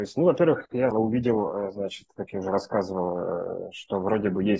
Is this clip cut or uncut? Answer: cut